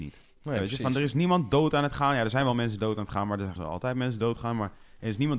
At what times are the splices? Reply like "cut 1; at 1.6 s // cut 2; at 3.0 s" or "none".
cut 1; at 3.6 s